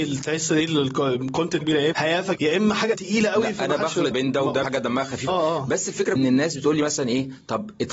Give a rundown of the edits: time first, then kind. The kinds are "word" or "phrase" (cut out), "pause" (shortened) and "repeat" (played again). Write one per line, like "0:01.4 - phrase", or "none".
0:01.6 - word
0:01.9 - word
0:02.3 - word
0:02.9 - word
0:04.1 - word
0:04.6 - word
0:05.3 - word
0:06.2 - word

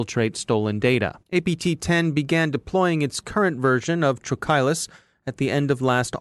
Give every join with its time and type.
0:01.2 - pause

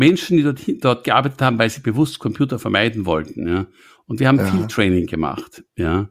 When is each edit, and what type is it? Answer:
none

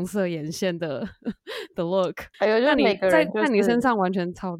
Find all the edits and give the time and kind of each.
0:02.3 - pause

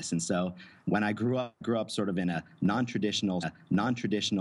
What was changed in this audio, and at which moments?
0:01.6 - word
0:03.4 - repeat

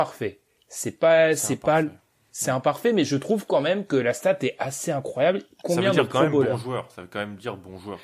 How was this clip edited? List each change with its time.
none

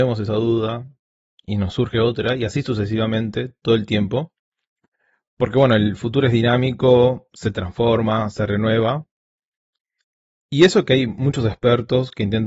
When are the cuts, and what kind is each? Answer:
none

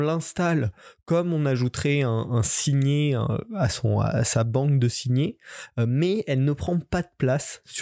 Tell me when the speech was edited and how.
none

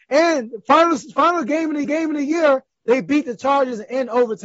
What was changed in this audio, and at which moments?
0:01.8 - repeat

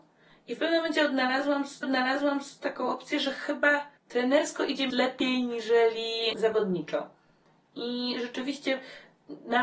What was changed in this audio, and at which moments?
0:01.8 - repeat
0:04.0 - pause
0:04.9 - word
0:06.3 - word

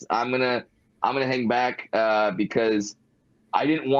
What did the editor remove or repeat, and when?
none

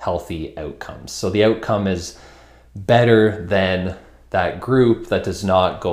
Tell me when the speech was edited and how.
none

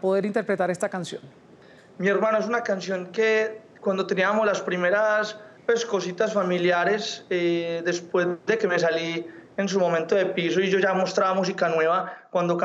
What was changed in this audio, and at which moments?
0:05.6 - pause

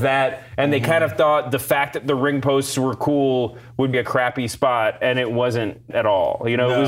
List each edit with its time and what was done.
0:03.9 - phrase
0:05.9 - word

